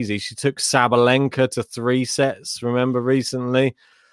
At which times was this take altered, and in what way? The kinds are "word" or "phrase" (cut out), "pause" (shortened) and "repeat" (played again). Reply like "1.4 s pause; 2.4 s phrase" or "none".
none